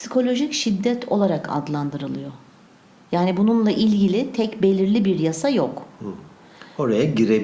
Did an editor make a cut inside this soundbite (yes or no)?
no